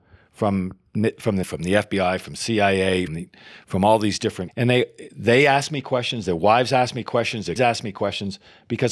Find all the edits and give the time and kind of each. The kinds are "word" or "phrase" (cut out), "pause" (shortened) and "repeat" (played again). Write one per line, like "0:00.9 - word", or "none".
0:01.4 - word
0:03.1 - word
0:04.5 - word
0:07.6 - word